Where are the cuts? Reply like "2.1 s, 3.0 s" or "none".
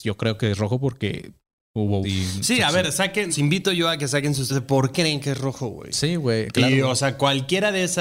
2.0 s, 3.3 s, 4.5 s, 4.9 s